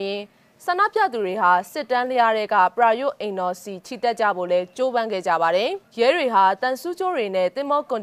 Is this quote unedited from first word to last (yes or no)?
yes